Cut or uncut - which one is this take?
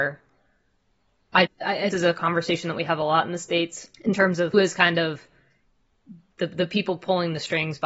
cut